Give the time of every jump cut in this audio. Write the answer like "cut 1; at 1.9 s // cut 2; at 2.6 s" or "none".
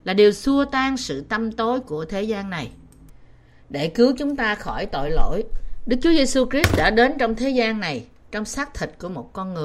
none